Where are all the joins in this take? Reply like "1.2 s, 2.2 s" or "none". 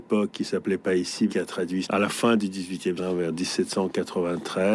1.3 s, 1.8 s, 3.0 s